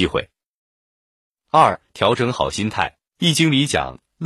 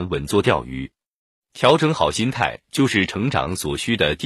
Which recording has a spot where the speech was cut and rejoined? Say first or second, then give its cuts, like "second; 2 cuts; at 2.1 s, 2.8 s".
first; 1 cut; at 3.1 s